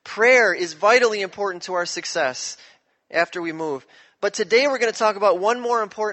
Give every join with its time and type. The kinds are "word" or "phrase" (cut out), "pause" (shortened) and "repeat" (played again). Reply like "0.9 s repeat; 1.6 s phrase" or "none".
none